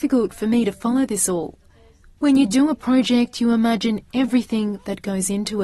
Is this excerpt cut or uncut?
uncut